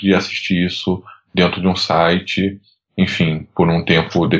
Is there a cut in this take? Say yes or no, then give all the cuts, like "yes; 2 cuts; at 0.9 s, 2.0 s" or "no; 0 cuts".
no; 0 cuts